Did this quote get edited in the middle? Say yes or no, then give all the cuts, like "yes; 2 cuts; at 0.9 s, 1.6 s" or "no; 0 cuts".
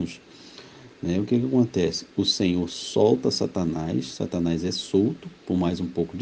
no; 0 cuts